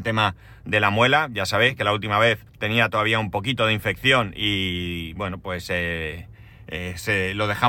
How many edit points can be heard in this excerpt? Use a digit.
1